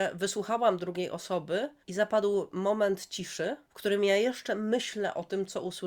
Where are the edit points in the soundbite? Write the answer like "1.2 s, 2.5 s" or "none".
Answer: 1.8 s, 3.6 s